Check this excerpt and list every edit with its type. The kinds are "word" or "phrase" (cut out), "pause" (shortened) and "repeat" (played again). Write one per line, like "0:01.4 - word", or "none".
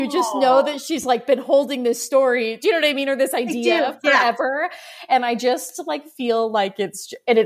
none